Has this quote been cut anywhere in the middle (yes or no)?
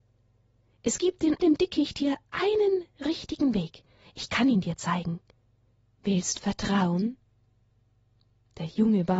yes